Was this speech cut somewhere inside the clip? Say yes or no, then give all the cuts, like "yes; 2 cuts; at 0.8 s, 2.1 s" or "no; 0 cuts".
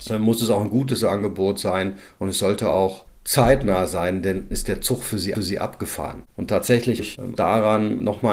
yes; 4 cuts; at 4.5 s, 5.3 s, 7.0 s, 7.4 s